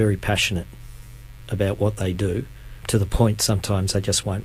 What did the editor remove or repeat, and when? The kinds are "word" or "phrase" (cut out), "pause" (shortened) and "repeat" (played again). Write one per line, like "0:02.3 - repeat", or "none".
none